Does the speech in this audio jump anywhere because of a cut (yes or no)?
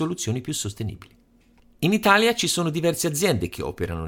no